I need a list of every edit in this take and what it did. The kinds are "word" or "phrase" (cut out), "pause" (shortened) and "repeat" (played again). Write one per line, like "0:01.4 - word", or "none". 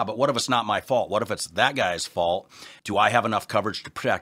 none